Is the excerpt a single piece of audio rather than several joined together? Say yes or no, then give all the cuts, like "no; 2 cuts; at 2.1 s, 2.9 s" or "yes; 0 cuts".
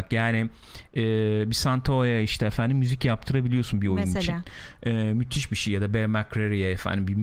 yes; 0 cuts